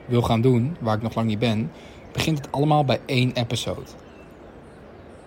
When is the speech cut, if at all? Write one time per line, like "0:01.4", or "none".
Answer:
none